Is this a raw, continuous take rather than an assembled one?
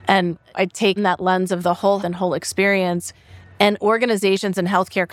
no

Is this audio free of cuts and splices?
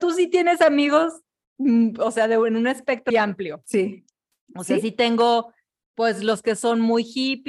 no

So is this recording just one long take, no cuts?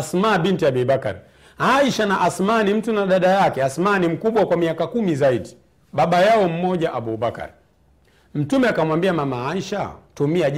yes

